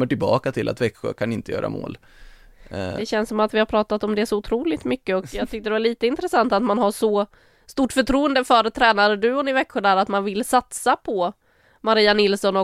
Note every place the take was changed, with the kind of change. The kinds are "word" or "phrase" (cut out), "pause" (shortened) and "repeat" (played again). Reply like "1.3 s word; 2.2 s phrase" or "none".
none